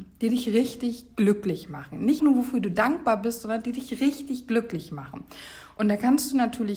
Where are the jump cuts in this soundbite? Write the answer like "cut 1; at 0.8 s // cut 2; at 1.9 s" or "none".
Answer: cut 1; at 2.2 s